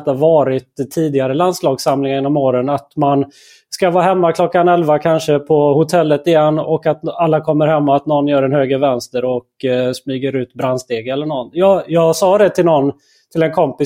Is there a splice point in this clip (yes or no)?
no